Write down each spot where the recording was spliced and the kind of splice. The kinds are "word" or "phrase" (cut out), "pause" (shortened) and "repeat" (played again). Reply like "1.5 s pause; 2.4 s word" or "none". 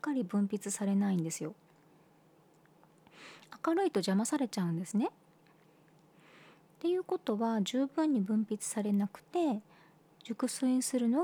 none